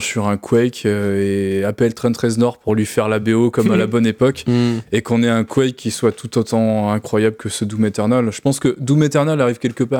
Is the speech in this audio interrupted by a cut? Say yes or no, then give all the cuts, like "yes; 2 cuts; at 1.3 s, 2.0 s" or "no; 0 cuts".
no; 0 cuts